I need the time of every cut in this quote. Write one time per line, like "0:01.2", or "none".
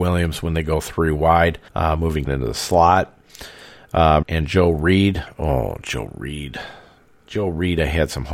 0:01.7
0:02.3
0:04.2